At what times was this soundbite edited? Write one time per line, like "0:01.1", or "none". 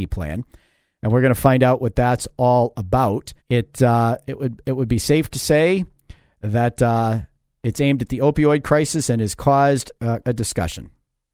0:03.4
0:10.2